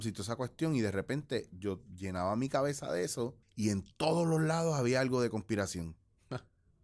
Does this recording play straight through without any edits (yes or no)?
no